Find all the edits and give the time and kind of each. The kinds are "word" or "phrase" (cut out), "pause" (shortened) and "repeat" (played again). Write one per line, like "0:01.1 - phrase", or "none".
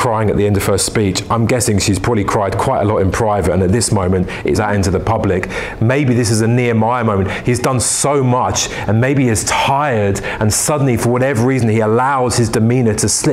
0:04.6 - phrase